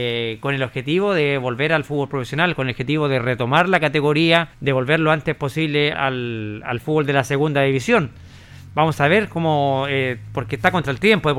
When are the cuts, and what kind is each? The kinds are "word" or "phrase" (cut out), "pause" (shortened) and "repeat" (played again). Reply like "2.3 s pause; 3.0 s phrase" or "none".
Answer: 4.5 s pause; 5.9 s word